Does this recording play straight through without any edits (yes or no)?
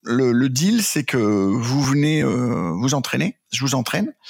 yes